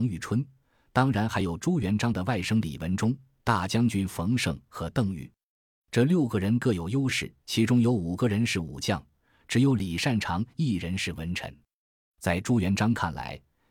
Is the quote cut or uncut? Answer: cut